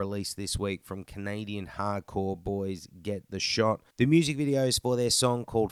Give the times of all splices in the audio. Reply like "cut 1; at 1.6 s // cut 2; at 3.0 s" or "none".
cut 1; at 3.9 s